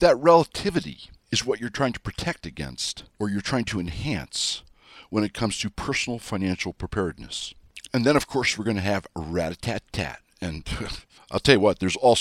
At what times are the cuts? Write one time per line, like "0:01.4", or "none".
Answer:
0:03.1